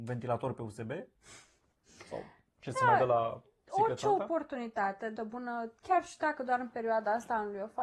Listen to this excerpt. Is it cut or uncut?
cut